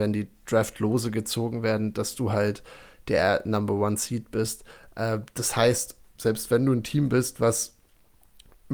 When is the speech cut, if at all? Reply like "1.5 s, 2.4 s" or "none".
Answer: none